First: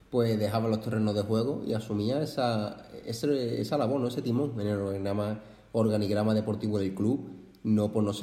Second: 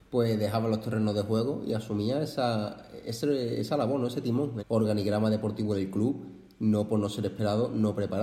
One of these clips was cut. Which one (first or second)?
second